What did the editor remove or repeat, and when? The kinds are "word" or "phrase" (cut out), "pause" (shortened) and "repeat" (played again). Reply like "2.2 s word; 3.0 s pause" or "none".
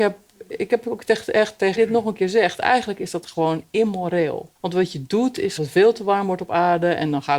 1.8 s phrase; 4.6 s pause; 5.6 s phrase